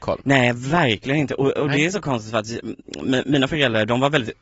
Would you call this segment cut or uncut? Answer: uncut